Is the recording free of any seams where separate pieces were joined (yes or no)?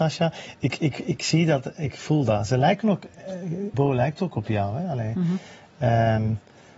no